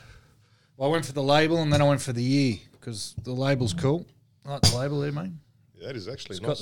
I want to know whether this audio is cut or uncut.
uncut